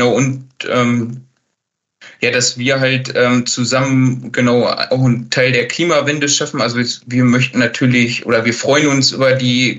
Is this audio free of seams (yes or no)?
yes